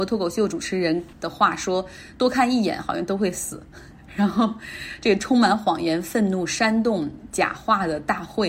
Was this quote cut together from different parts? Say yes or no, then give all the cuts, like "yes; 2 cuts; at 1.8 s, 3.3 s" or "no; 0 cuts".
yes; 1 cut; at 1.1 s